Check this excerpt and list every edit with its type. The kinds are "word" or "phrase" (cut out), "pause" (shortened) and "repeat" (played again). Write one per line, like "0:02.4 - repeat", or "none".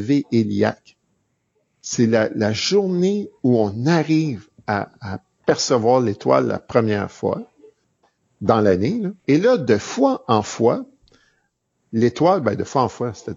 0:09.2 - pause

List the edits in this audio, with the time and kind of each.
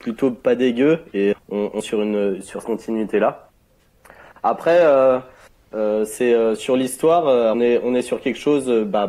0:01.3 - word
0:01.8 - word
0:02.6 - word
0:06.6 - word
0:07.5 - word

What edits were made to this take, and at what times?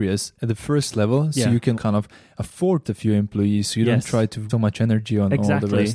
0:01.7 - word
0:02.8 - phrase
0:04.5 - word

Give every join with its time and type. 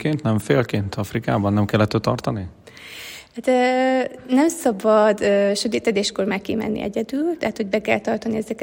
none

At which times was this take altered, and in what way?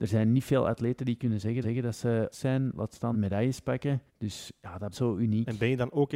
0:01.6 - repeat
0:02.3 - phrase
0:03.1 - phrase
0:04.1 - pause
0:04.9 - word

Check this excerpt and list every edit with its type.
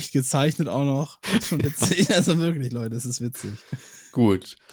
none

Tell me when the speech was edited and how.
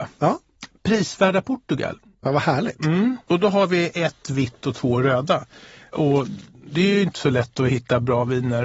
none

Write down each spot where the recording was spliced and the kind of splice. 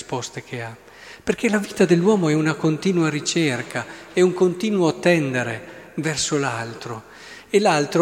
none

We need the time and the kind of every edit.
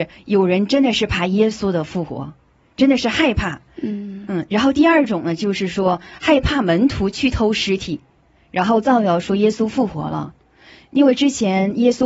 none

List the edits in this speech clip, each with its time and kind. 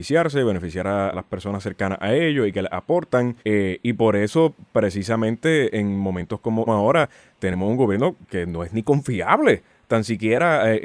0:01.1 - word
0:03.4 - pause
0:06.7 - phrase

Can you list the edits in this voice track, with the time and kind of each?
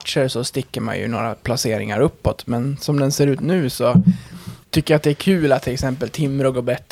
0:04.6 - pause

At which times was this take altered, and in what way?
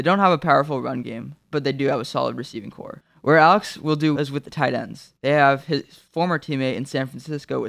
0:04.2 - word

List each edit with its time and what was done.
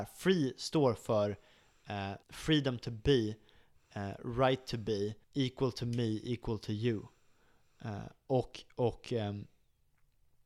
0:02.2 - pause
0:05.2 - pause

